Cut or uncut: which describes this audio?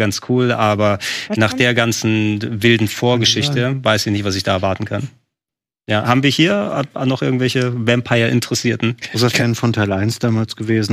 uncut